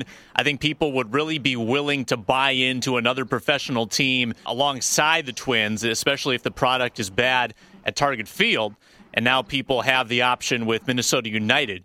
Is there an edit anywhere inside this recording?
no; 0 cuts

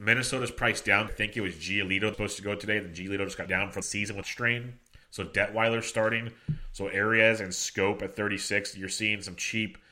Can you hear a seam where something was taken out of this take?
yes; 6 cuts; at 1.1 s, 2.1 s, 3.5 s, 3.8 s, 4.2 s, 5.0 s

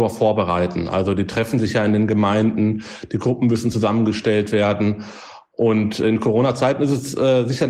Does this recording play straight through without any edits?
yes; 0 cuts

